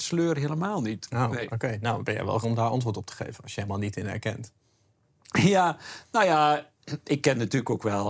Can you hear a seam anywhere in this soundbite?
yes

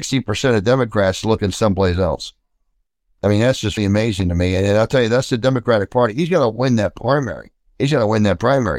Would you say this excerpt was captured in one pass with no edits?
no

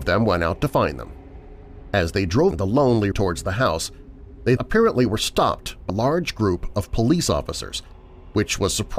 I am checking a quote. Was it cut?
yes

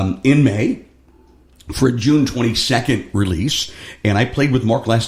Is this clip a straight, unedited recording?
yes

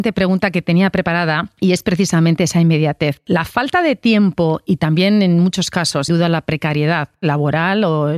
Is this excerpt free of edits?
no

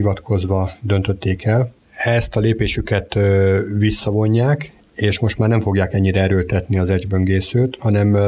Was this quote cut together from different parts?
no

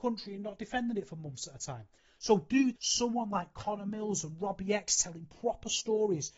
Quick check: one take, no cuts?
no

